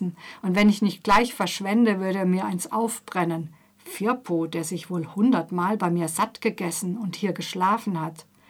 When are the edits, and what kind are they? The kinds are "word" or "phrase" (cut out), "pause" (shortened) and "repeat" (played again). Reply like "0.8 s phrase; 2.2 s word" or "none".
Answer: none

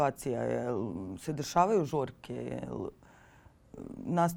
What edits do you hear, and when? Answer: none

